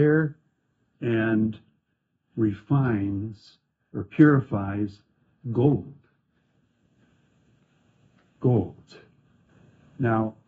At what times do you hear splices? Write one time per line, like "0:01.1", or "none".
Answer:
0:00.9